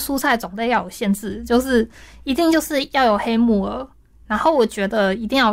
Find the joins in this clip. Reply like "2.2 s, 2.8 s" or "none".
none